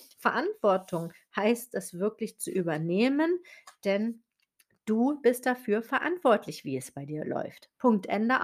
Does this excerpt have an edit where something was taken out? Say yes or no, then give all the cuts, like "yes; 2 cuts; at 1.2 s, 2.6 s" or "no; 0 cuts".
no; 0 cuts